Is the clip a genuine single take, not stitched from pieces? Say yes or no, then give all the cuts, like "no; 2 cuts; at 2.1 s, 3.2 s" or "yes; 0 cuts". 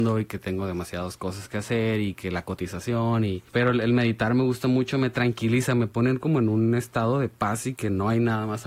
no; 1 cut; at 3.5 s